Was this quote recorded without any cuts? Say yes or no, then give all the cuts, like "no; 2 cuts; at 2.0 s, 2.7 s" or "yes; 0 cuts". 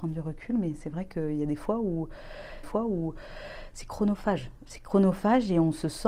no; 1 cut; at 2.6 s